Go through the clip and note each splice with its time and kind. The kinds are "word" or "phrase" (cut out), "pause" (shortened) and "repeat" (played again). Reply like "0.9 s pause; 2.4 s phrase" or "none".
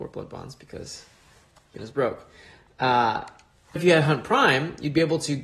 1.8 s word; 3.8 s word